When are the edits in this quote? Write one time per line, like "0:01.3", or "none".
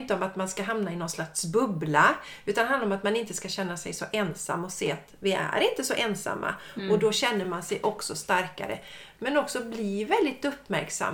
none